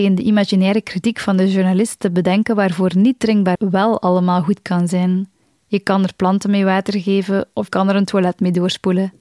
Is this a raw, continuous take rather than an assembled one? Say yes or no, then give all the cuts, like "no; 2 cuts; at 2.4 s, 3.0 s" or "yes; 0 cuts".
no; 3 cuts; at 3.5 s, 5.4 s, 7.7 s